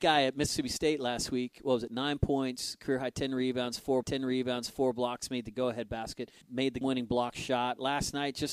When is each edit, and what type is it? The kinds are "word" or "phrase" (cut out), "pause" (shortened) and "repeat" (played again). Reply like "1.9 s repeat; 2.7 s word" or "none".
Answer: 4.0 s repeat; 6.4 s pause; 6.8 s word